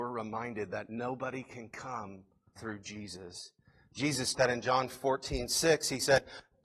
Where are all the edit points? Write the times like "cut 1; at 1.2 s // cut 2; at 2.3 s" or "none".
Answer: cut 1; at 2.6 s // cut 2; at 4.3 s